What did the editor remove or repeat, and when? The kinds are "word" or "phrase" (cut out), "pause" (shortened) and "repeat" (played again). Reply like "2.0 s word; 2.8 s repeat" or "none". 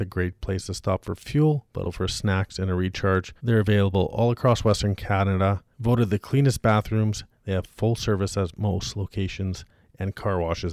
1.8 s word; 3.4 s pause; 5.7 s pause